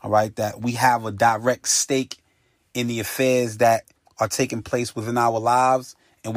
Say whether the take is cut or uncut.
uncut